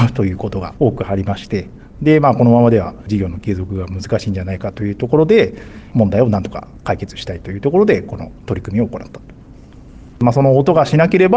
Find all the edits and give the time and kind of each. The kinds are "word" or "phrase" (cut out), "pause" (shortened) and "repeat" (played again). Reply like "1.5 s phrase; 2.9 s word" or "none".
none